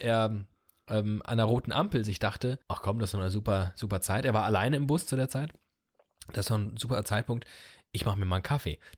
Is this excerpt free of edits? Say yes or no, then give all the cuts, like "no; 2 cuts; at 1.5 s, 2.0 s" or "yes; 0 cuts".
no; 1 cut; at 2.6 s